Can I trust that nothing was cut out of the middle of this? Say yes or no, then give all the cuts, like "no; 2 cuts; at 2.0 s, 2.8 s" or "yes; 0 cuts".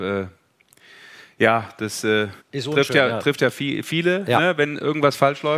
no; 1 cut; at 2.4 s